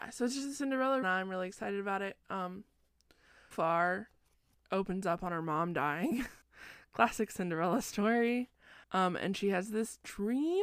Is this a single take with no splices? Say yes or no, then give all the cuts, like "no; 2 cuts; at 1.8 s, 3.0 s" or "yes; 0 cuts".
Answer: no; 4 cuts; at 1.0 s, 3.5 s, 6.4 s, 8.8 s